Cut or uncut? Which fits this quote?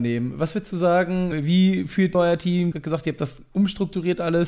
cut